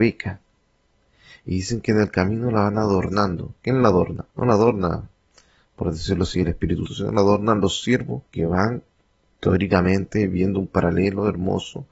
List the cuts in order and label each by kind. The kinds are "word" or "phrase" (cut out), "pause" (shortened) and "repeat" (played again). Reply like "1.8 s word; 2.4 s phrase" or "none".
4.3 s pause; 6.9 s word; 8.3 s pause

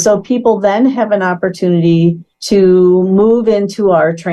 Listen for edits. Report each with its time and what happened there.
2.3 s pause

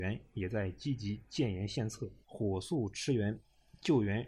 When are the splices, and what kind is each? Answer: 2.2 s pause

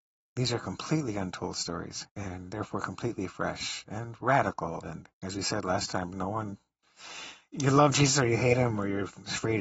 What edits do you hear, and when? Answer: 2.1 s pause; 5.1 s pause

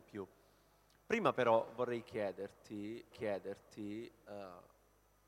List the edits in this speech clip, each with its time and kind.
3.1 s repeat

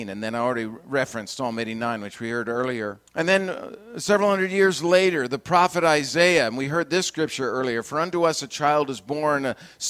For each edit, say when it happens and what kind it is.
3.1 s pause

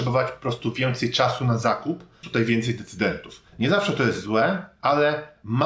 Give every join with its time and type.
2.2 s phrase; 3.5 s pause

